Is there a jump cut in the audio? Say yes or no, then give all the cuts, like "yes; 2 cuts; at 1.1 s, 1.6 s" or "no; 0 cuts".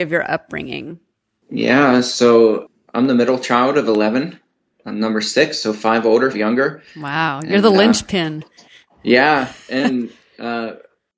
yes; 1 cut; at 6.3 s